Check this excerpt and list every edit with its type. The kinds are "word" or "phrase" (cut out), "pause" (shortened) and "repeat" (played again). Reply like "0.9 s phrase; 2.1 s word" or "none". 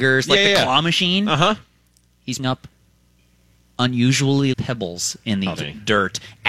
2.4 s word; 4.5 s word; 5.6 s word